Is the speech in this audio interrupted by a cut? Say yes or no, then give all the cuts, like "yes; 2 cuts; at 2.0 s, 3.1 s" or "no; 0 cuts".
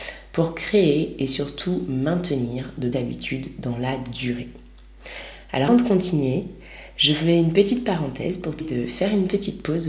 yes; 3 cuts; at 2.9 s, 5.7 s, 8.6 s